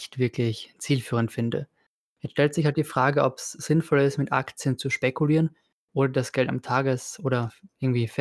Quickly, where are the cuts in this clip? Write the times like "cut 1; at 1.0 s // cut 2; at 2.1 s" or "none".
none